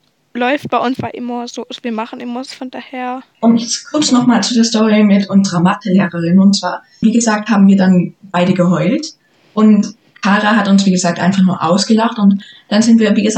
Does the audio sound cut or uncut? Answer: cut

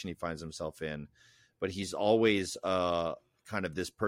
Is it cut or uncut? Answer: uncut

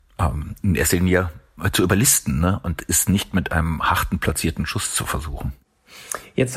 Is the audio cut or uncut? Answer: uncut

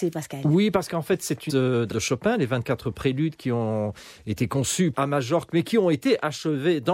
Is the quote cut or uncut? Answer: cut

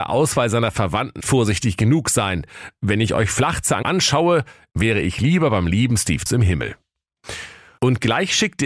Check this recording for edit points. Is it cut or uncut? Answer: cut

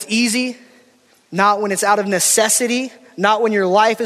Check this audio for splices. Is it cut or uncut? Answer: uncut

